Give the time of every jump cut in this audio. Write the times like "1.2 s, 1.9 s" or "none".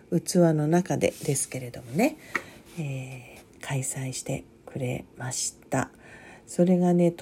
3.5 s, 4.5 s, 5.6 s